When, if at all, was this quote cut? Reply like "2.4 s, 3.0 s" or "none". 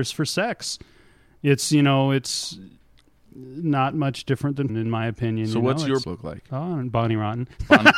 4.7 s, 6.0 s

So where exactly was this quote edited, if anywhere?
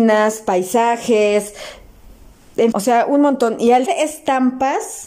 2.7 s, 3.9 s

